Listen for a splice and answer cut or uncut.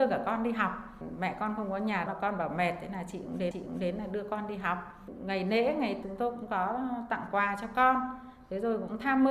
cut